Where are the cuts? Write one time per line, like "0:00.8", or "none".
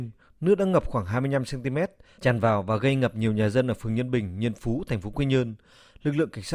none